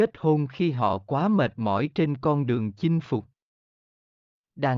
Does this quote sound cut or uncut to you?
uncut